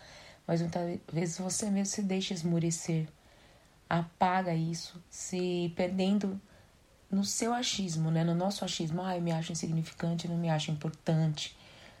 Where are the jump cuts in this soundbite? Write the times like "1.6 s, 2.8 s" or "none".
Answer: none